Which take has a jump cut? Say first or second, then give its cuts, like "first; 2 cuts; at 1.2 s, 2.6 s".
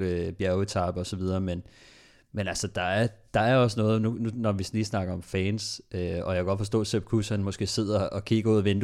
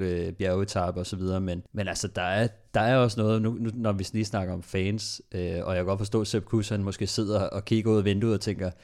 second; 1 cut; at 1.7 s